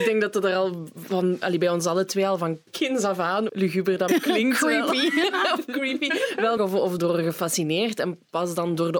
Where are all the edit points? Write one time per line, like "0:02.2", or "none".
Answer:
0:02.7
0:03.5
0:04.1
0:06.6
0:07.0